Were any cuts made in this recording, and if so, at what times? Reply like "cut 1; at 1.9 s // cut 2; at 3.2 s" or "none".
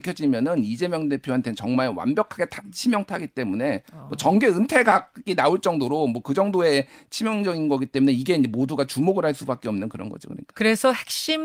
none